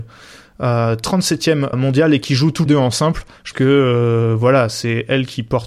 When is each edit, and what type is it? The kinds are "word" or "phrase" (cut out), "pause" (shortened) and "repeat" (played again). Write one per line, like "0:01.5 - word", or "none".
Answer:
0:01.7 - word
0:02.7 - word
0:03.5 - word